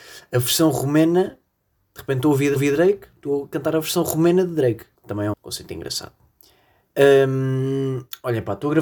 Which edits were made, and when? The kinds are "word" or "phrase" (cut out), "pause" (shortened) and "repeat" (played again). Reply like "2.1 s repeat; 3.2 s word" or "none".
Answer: 2.6 s repeat; 5.0 s pause; 5.3 s word

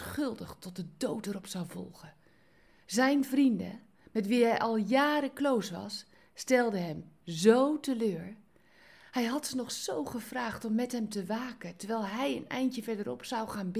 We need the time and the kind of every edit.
none

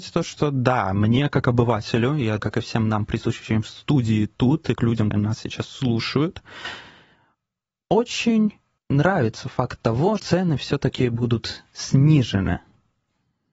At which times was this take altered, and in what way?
2.4 s word; 4.8 s word; 5.1 s word; 8.8 s pause; 10.2 s word

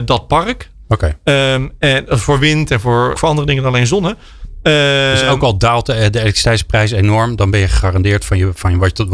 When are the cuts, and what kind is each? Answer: 3.1 s word

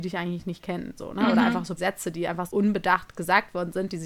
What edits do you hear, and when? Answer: 1.0 s word; 1.8 s word; 2.5 s word

